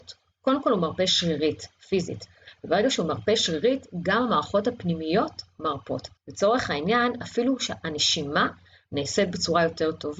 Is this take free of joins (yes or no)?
no